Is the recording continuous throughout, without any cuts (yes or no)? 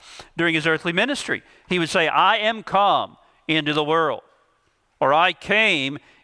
yes